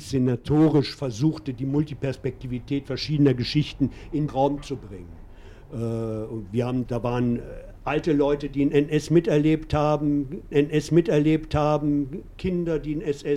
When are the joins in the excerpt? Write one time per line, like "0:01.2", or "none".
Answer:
0:04.3
0:06.8
0:10.5